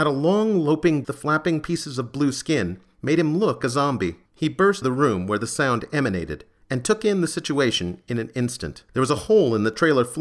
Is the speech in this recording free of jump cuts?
no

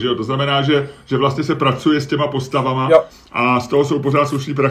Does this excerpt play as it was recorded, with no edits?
yes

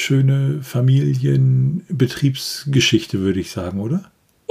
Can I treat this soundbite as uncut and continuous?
yes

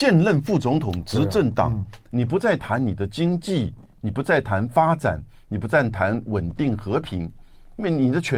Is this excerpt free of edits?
yes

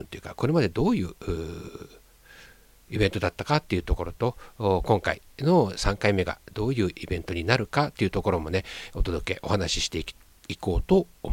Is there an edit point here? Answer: no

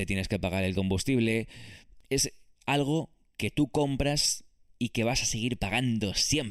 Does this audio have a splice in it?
no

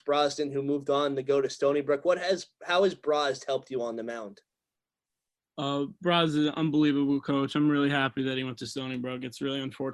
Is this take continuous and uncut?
yes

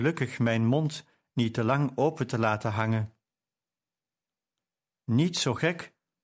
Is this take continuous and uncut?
yes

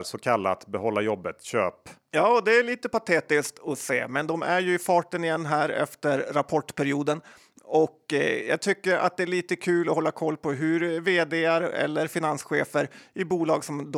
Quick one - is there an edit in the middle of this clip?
no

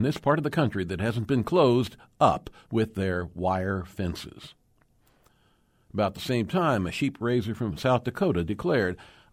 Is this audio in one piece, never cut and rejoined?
yes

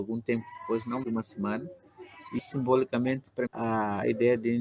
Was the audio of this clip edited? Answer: yes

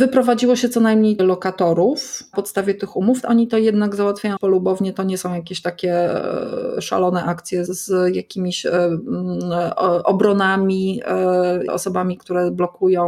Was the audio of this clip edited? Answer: yes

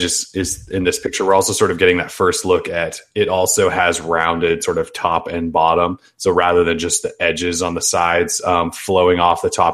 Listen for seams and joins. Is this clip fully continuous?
yes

